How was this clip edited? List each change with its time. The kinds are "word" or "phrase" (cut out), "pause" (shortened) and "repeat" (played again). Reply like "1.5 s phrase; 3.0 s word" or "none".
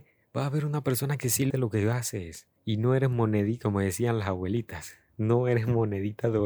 1.5 s word; 2.6 s pause